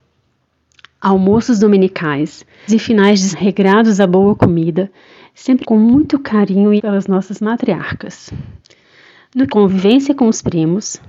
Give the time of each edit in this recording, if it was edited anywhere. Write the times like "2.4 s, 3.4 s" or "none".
2.7 s, 3.3 s, 5.6 s, 6.8 s, 9.5 s